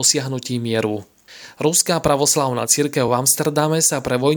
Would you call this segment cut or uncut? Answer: uncut